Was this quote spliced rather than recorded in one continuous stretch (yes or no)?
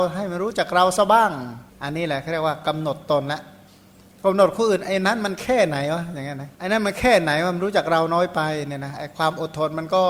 yes